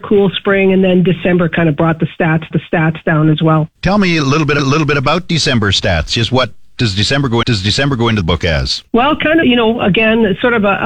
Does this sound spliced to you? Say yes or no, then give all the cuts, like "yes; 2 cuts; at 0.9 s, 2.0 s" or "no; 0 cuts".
yes; 7 cuts; at 2.5 s, 3.8 s, 4.6 s, 7.4 s, 8.2 s, 8.9 s, 9.4 s